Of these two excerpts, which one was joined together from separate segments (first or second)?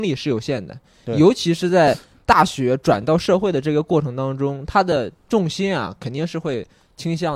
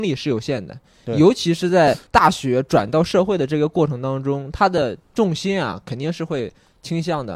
second